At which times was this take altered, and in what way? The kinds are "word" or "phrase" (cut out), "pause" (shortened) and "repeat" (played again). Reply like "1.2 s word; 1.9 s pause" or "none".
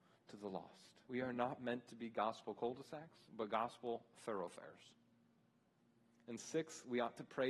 1.0 s pause; 3.3 s pause